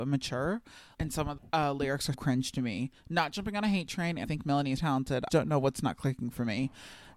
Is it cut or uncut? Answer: cut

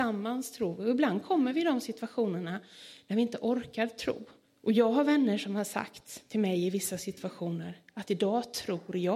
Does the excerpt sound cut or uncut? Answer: cut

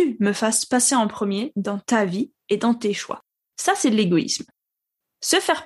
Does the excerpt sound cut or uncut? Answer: uncut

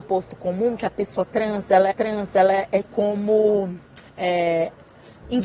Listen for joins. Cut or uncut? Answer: cut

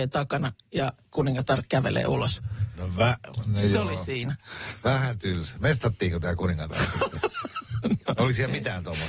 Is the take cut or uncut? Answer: uncut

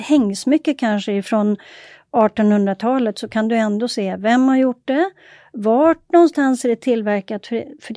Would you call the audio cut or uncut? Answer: uncut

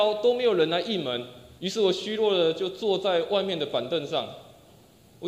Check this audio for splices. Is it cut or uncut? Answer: cut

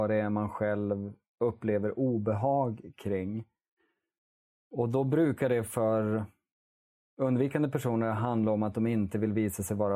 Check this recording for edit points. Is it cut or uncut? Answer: uncut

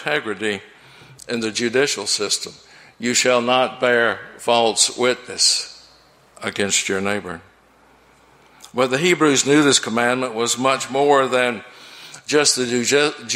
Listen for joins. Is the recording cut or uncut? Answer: uncut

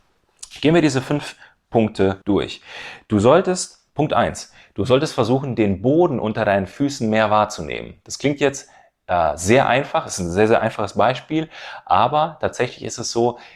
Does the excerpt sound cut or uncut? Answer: cut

